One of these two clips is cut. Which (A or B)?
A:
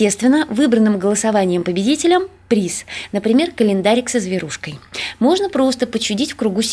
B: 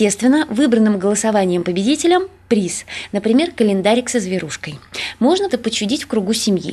B